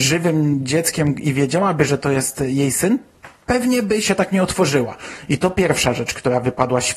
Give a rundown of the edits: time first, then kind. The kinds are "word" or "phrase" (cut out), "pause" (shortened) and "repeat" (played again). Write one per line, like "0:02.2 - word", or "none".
none